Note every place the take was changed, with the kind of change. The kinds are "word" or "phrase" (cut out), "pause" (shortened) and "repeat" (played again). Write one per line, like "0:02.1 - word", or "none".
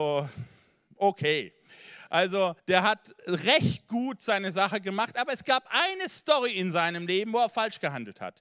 0:02.6 - pause